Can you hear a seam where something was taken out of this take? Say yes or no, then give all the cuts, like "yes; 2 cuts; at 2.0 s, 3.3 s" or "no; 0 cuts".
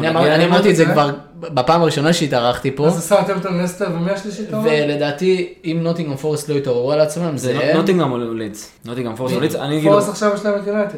yes; 1 cut; at 8.8 s